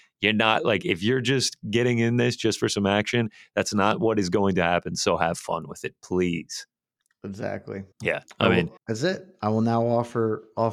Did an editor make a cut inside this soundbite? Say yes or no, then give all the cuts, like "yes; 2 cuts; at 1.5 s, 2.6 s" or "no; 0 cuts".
yes; 2 cuts; at 7.9 s, 8.8 s